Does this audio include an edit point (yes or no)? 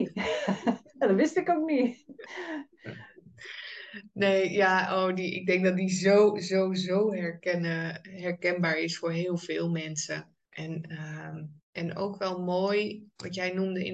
yes